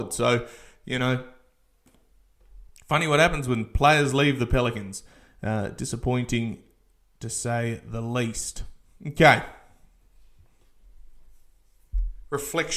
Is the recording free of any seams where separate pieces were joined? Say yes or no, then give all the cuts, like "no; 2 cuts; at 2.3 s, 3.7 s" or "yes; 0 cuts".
yes; 0 cuts